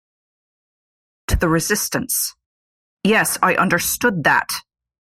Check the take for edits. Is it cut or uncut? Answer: cut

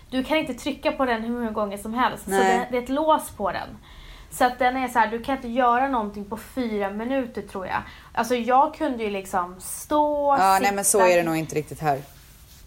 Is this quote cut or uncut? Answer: uncut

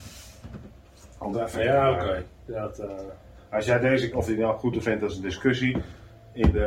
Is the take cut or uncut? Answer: cut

